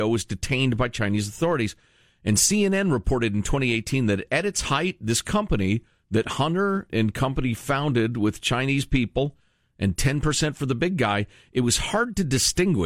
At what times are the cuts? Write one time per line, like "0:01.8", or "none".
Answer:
0:06.9